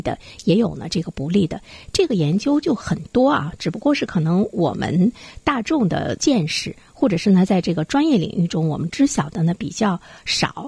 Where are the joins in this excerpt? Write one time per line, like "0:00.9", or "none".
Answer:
none

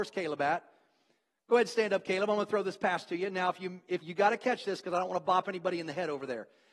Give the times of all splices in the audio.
0:04.0

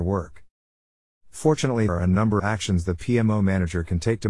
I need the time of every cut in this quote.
0:01.9
0:02.4

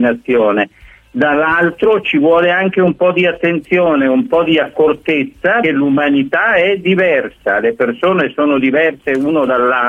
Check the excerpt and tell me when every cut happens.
0:05.6

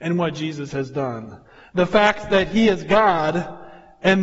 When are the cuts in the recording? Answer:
none

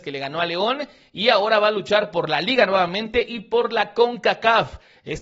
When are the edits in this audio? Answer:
none

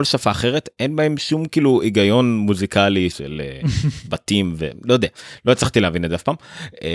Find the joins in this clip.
0:03.1

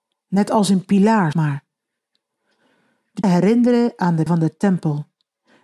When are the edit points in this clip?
0:01.3
0:03.2
0:04.3

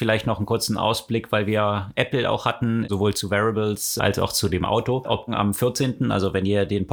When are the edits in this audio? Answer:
0:05.3

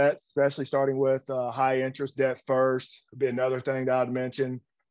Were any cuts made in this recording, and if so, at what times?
none

